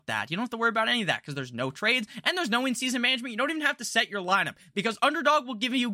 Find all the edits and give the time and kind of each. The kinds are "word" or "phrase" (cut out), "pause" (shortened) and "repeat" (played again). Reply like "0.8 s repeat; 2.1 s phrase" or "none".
none